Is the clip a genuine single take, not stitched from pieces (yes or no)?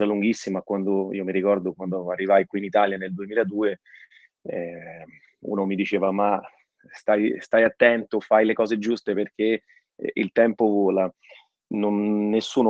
yes